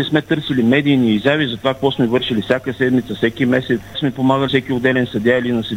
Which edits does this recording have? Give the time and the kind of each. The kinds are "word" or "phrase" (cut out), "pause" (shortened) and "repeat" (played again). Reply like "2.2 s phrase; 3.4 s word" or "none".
3.9 s word; 4.5 s word